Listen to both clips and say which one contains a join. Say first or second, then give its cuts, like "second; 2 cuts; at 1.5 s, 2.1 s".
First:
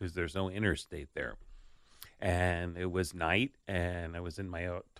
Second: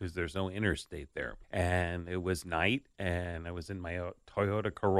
second; 1 cut; at 1.4 s